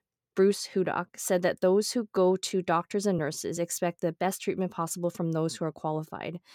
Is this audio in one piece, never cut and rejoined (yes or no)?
yes